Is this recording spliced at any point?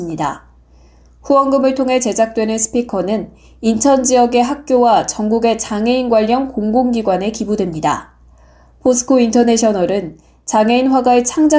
no; 0 cuts

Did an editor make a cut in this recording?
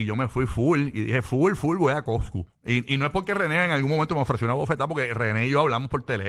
yes; 1 cut; at 2.5 s

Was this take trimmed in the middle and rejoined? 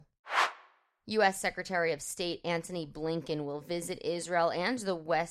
no; 0 cuts

